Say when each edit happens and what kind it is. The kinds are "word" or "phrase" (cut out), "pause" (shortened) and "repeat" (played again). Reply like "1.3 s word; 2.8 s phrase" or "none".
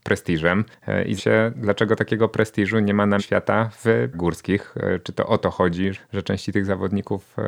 1.2 s word; 3.2 s word; 4.1 s word; 5.9 s word

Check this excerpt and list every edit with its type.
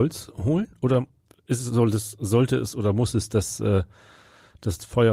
none

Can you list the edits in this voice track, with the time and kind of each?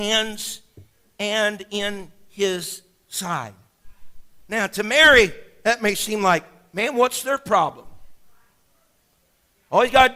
none

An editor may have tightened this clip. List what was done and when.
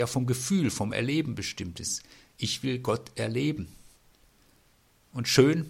none

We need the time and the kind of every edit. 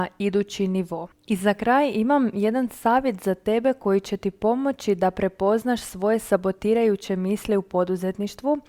1.1 s pause

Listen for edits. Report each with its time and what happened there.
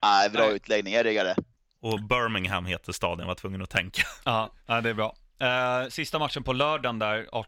none

